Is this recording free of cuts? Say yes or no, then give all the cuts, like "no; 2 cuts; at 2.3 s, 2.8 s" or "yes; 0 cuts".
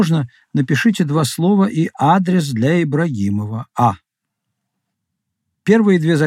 yes; 0 cuts